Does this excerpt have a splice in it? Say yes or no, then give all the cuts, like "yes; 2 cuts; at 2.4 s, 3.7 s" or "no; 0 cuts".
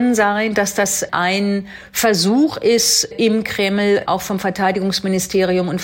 yes; 2 cuts; at 1.1 s, 3.1 s